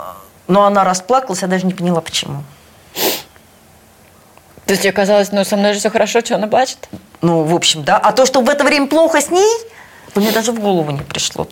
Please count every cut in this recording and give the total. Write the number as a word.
zero